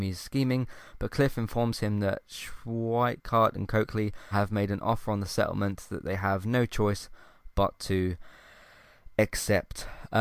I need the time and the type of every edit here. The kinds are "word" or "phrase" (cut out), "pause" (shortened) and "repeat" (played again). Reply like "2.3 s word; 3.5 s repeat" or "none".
4.3 s word